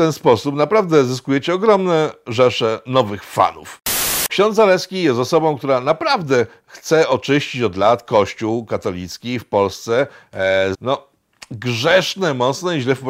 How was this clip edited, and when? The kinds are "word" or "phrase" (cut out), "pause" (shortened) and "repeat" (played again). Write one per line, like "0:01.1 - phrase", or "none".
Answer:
0:04.3 - word
0:10.7 - phrase